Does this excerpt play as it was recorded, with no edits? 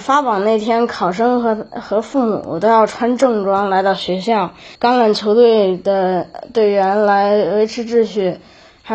no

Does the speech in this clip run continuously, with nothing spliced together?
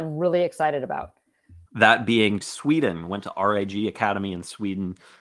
no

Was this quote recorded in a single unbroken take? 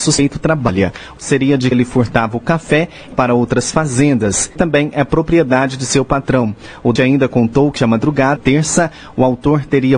no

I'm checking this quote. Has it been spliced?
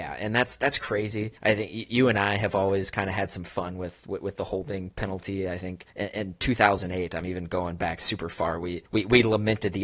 yes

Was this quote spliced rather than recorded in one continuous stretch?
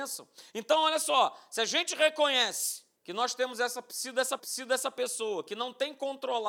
yes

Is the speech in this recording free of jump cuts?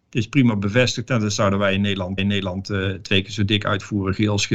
no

